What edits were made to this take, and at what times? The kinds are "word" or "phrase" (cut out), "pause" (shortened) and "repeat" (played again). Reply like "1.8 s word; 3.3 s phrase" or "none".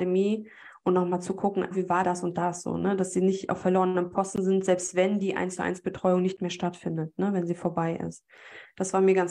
1.7 s word; 2.0 s word